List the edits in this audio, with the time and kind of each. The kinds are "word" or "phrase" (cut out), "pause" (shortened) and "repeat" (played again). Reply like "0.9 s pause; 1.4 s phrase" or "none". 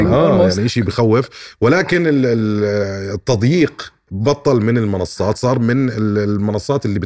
none